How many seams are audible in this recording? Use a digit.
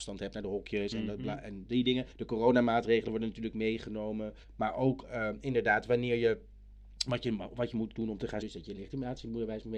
3